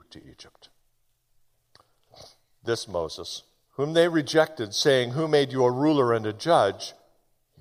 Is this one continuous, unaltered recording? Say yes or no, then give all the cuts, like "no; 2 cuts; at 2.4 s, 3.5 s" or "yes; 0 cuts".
yes; 0 cuts